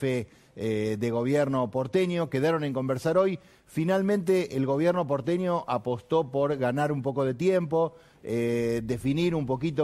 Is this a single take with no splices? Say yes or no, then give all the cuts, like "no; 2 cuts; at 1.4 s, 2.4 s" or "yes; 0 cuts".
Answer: yes; 0 cuts